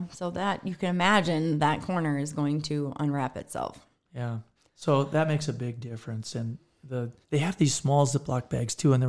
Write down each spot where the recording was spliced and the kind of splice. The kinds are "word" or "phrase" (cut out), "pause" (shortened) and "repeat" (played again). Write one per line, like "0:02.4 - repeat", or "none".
0:04.6 - pause
0:07.2 - pause

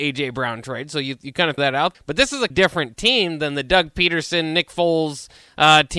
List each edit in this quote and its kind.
0:01.6 - word
0:01.9 - word
0:02.5 - word

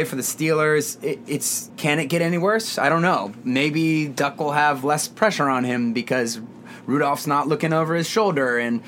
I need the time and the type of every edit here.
0:01.7 - word

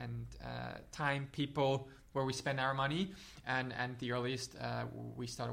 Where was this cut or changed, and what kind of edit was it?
none

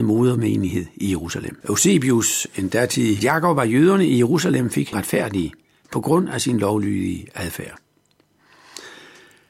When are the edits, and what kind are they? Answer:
0:01.6 - pause
0:03.2 - phrase
0:04.9 - phrase

